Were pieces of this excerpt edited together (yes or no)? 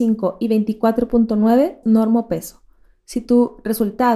yes